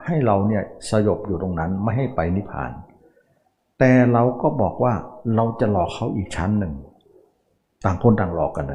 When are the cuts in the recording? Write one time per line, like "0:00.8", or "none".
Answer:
none